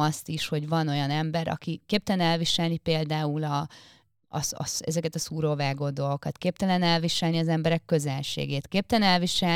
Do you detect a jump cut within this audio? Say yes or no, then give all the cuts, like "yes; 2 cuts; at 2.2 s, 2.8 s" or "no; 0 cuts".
no; 0 cuts